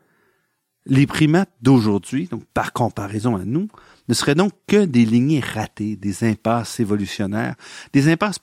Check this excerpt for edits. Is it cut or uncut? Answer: uncut